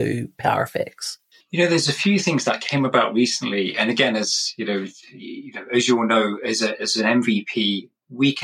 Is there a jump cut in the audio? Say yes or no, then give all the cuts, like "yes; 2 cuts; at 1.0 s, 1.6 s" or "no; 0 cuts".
yes; 1 cut; at 1.4 s